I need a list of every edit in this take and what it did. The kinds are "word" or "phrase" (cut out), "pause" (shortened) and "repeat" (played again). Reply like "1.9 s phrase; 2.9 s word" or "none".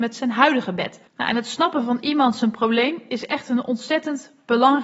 1.1 s pause